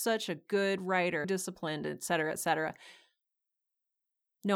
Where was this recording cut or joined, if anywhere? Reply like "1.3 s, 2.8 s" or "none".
1.2 s